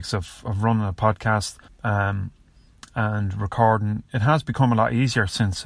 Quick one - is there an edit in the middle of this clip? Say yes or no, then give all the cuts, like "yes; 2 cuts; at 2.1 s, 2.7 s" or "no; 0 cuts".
yes; 1 cut; at 1.7 s